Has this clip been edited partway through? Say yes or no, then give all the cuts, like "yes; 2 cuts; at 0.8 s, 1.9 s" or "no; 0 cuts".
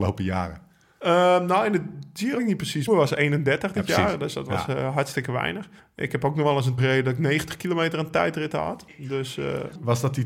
yes; 4 cuts; at 2.4 s, 2.9 s, 5.8 s, 6.8 s